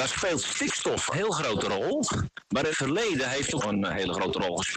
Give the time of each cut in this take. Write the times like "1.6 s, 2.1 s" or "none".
1.1 s, 2.7 s, 3.6 s